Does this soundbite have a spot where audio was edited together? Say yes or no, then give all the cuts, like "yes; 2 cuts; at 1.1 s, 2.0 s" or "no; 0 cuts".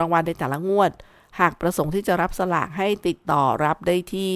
no; 0 cuts